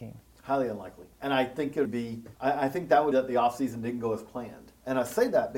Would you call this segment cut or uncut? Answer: cut